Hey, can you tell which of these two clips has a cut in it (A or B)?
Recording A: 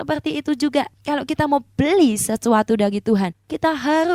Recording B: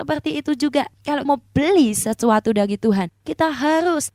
B